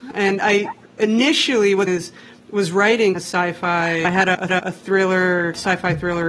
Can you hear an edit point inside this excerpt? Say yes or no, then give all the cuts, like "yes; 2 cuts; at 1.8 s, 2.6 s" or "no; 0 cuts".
yes; 3 cuts; at 1.9 s, 3.1 s, 4.5 s